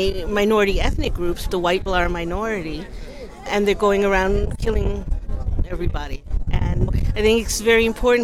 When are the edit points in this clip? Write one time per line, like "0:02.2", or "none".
0:01.5
0:01.9
0:03.5
0:06.9